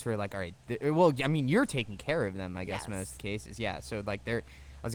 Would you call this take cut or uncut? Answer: uncut